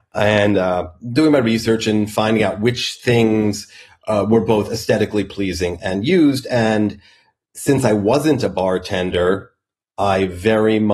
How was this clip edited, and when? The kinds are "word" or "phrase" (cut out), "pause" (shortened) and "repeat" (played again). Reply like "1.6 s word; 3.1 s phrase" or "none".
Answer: none